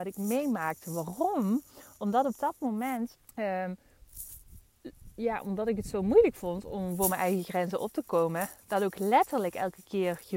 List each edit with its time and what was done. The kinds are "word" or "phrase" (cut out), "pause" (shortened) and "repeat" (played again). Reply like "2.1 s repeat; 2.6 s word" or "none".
3.2 s pause